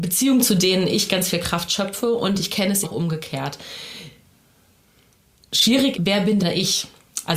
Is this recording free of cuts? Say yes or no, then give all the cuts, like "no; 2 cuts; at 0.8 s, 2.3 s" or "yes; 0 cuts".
no; 3 cuts; at 2.8 s, 5.9 s, 6.4 s